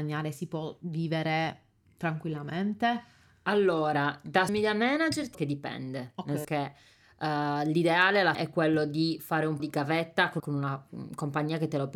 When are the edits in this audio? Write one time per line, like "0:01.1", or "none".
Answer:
0:04.5
0:05.3
0:06.4
0:08.3
0:09.6
0:10.4

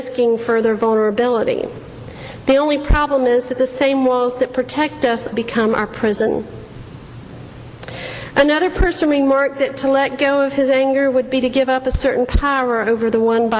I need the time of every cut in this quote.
0:05.3

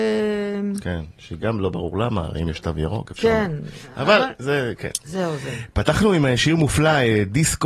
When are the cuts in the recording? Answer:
none

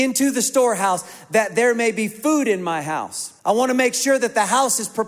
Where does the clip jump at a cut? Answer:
0:03.4

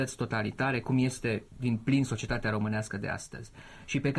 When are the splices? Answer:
0:01.5

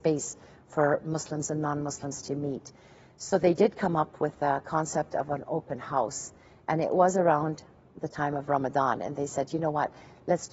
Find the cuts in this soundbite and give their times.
none

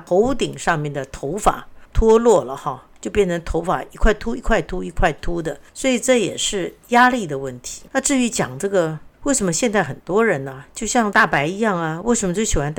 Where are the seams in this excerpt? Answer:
0:05.7
0:07.9
0:09.1

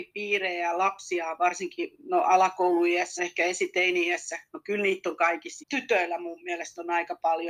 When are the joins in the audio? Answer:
0:03.2
0:05.6

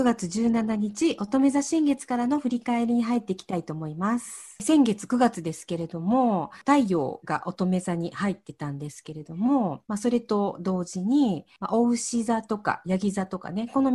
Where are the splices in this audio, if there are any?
0:09.8

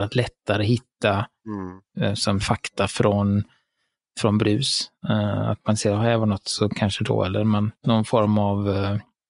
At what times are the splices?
0:02.4
0:07.8

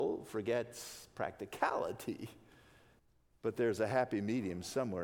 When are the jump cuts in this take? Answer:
0:03.0

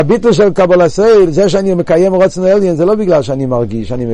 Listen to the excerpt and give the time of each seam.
none

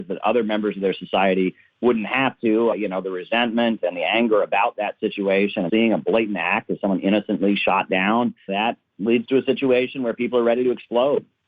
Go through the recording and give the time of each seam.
0:02.7
0:05.7
0:08.5

